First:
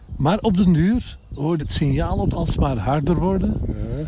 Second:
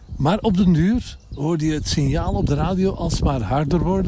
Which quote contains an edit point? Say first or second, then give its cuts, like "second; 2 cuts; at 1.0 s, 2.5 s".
first; 2 cuts; at 1.6 s, 2.3 s